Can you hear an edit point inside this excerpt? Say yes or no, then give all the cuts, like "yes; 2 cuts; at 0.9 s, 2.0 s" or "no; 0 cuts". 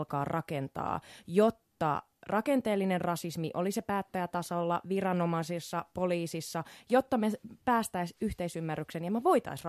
no; 0 cuts